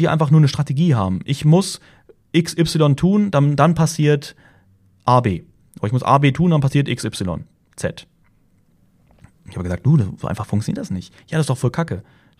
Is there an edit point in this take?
no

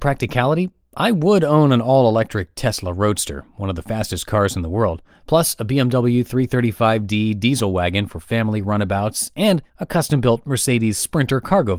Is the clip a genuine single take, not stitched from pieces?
no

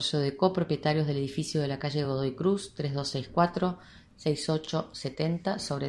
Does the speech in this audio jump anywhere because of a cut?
no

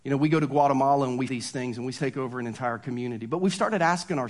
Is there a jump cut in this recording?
yes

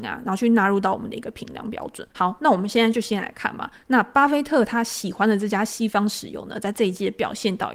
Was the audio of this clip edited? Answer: yes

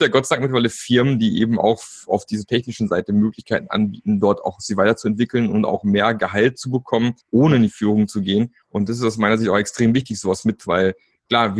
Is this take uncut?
no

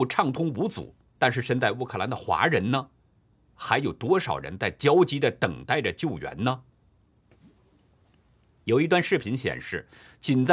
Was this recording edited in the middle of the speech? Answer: yes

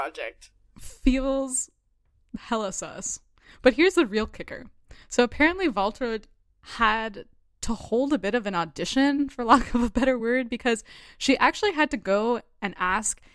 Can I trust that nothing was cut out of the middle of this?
yes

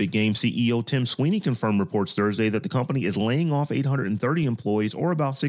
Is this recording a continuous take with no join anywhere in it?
yes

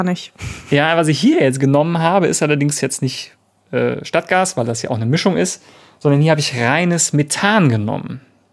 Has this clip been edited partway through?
no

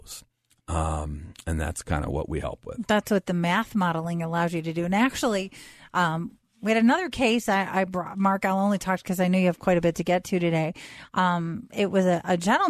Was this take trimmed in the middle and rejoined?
no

